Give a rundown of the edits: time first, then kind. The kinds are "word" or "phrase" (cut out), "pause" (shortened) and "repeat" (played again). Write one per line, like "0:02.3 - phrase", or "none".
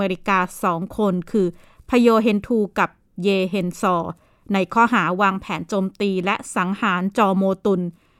none